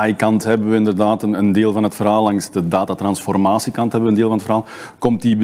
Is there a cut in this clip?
no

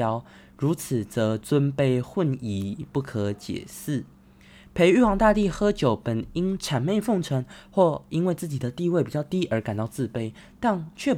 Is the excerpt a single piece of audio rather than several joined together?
yes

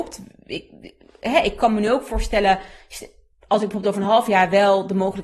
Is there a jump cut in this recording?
no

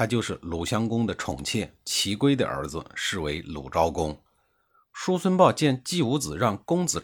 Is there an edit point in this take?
no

